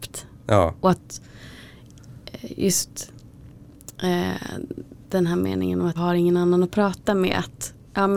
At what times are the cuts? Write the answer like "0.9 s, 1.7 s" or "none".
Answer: 5.0 s, 6.0 s